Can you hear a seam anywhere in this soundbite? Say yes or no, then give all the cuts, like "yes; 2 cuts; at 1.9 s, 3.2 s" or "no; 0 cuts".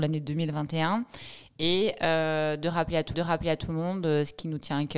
yes; 1 cut; at 3.1 s